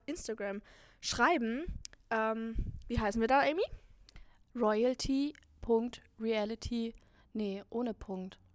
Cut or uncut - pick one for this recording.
uncut